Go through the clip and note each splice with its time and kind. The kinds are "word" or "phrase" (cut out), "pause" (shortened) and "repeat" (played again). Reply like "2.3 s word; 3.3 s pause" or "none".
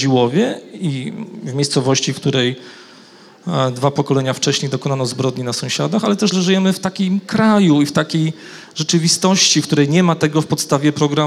6.3 s word